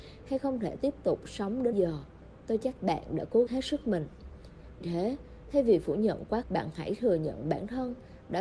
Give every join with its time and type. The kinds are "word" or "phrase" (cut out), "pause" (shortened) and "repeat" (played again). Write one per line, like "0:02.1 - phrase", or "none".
0:01.7 - word
0:02.8 - word
0:03.5 - word
0:04.8 - word
0:06.4 - word

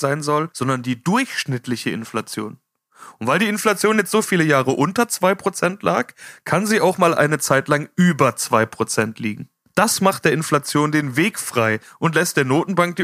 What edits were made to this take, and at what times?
none

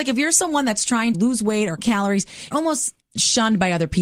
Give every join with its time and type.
0:01.1 - word
0:01.8 - word
0:02.5 - word
0:03.0 - word

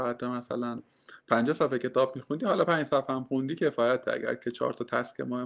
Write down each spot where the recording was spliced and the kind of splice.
0:01.2 - pause

